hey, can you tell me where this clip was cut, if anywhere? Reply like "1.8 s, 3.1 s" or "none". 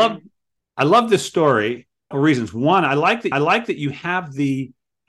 2.1 s, 3.3 s